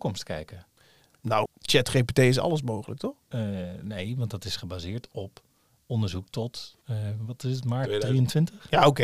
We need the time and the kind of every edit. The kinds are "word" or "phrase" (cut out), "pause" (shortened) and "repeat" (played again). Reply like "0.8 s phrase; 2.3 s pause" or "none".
1.4 s word